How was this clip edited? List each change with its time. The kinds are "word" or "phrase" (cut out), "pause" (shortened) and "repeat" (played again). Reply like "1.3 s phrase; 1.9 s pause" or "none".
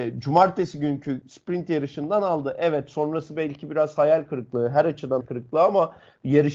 5.2 s word